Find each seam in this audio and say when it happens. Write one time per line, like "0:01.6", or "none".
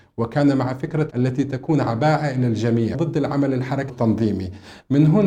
0:01.1
0:02.9
0:03.9